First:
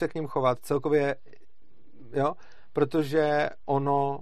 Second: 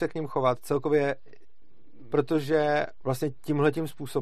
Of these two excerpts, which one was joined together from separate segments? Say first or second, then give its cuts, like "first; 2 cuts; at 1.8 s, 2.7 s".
second; 2 cuts; at 2.1 s, 3.0 s